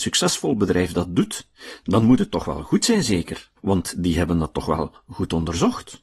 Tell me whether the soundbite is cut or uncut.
cut